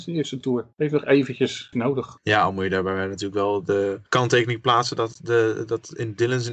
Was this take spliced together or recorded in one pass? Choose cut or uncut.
cut